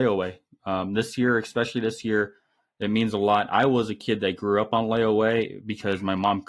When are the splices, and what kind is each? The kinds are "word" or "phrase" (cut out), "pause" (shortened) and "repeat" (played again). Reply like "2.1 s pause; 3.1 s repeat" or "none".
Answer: none

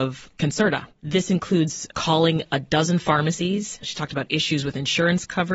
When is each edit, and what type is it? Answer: 0.9 s pause; 1.9 s phrase; 3.8 s word

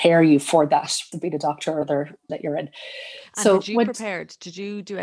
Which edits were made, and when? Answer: 1.1 s word; 1.8 s word; 2.3 s word

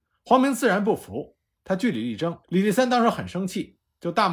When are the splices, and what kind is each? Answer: 2.4 s pause

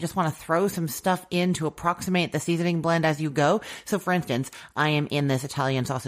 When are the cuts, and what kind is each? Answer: none

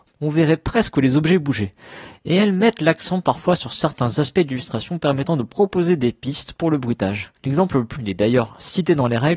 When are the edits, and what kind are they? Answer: 7.4 s pause; 8.0 s word

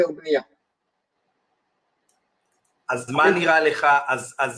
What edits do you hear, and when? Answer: 3.1 s word

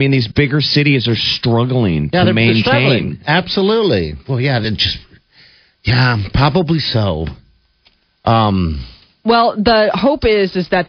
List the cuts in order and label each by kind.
none

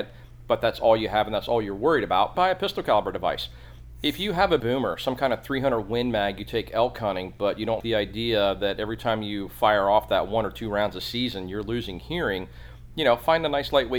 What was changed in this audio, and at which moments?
2.3 s word; 4.6 s word; 7.8 s word

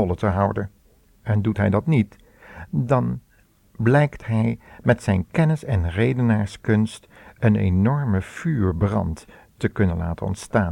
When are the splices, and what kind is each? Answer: none

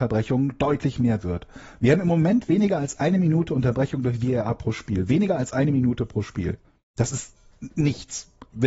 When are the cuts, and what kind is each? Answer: 6.6 s pause

